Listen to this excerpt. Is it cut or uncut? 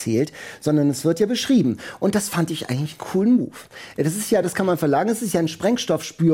uncut